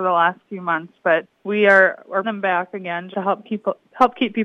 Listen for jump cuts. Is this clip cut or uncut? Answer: cut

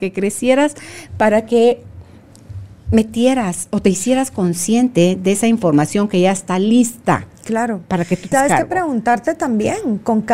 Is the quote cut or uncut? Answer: cut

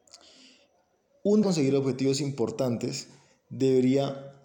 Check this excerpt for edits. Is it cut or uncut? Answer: cut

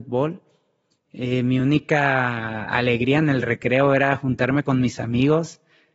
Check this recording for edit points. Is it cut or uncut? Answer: uncut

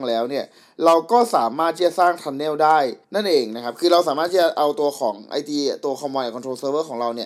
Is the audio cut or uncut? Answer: cut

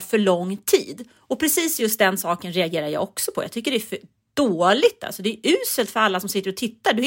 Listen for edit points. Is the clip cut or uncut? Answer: uncut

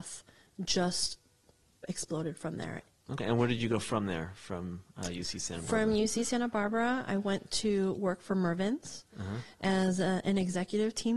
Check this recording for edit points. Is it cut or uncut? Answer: uncut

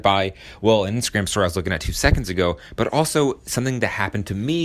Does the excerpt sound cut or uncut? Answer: uncut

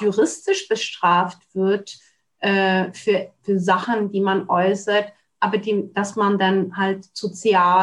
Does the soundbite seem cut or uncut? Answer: uncut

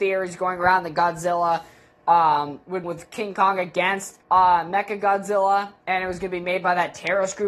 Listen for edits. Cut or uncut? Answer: cut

